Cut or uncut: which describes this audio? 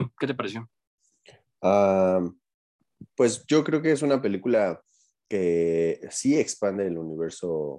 uncut